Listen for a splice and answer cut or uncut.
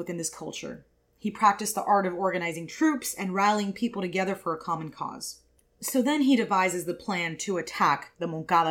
uncut